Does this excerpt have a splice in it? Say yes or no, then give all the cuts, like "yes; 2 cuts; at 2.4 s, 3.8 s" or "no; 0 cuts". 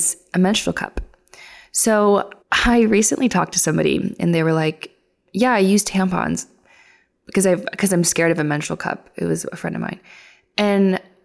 yes; 1 cut; at 2.4 s